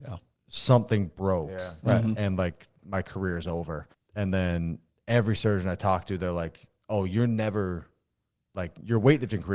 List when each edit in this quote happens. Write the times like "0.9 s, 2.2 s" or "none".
3.9 s

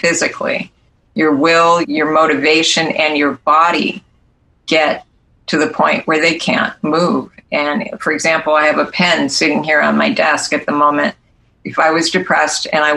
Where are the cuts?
1.8 s, 6.4 s

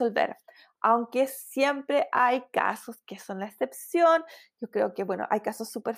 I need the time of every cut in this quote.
none

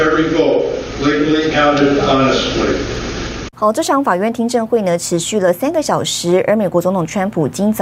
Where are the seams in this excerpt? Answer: 0.9 s, 1.5 s, 3.5 s

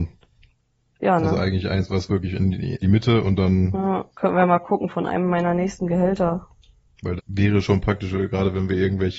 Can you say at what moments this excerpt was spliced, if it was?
2.8 s, 4.1 s, 7.2 s

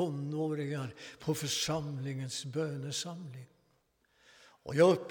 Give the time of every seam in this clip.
none

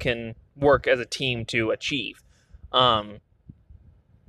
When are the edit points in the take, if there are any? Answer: none

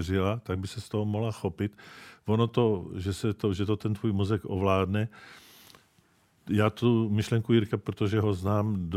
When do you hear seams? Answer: 7.7 s

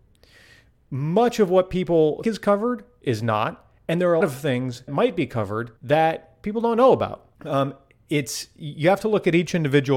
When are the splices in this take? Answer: 2.2 s, 4.2 s, 4.9 s, 5.8 s, 7.3 s

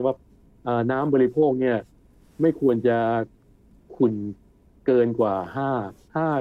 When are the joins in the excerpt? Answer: none

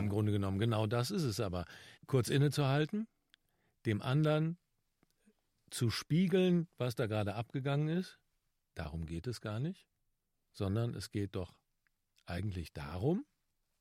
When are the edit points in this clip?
2.0 s

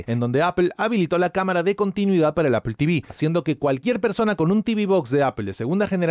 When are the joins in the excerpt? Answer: none

